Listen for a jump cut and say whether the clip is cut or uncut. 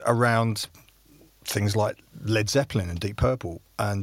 uncut